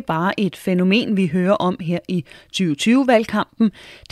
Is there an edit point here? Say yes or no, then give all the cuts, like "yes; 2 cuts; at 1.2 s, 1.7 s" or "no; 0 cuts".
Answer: no; 0 cuts